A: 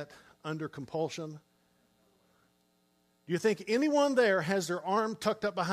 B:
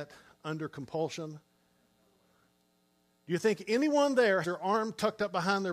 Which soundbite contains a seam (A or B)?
B